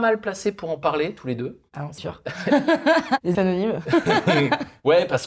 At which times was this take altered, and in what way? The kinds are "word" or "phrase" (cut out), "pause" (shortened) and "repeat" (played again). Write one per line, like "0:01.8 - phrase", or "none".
0:02.0 - word
0:03.3 - word